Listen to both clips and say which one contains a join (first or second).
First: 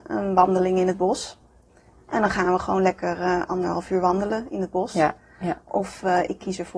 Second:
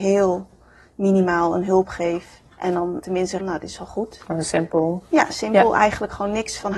second